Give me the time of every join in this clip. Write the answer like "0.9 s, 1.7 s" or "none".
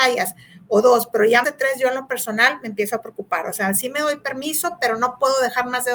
1.4 s